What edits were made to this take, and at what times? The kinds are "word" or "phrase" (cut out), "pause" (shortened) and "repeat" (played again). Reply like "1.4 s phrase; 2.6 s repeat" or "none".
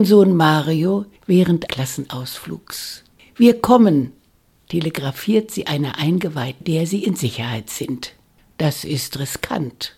1.7 s word; 3.2 s pause; 6.6 s phrase